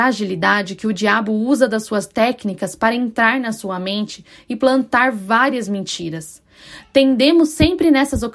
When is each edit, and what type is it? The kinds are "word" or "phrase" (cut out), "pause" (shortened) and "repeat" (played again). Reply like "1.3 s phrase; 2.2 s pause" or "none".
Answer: none